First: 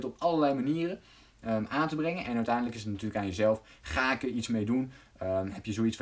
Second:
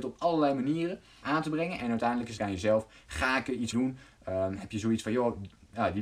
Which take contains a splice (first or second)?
second